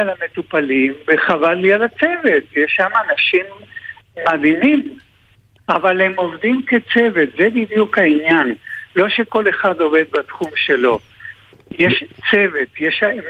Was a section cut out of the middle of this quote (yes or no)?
no